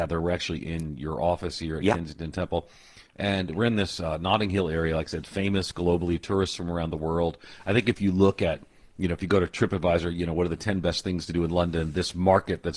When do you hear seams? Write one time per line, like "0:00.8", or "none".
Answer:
none